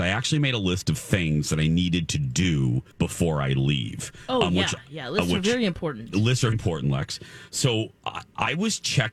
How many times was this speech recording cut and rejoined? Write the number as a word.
two